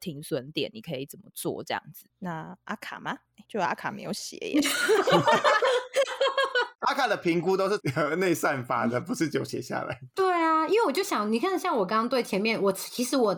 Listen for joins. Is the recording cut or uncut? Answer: cut